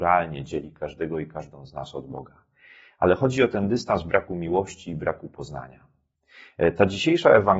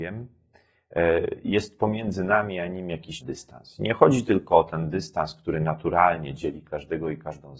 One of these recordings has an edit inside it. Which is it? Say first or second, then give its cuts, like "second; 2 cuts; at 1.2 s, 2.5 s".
second; 1 cut; at 3.2 s